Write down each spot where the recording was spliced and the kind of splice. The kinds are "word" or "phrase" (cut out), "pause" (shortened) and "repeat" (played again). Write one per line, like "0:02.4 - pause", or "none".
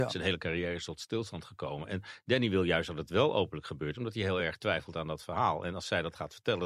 none